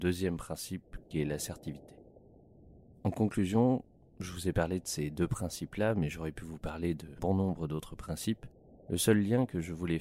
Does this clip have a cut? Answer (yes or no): no